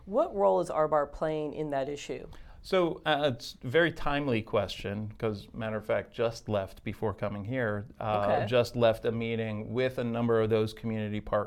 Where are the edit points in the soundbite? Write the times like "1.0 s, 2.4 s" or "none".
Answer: none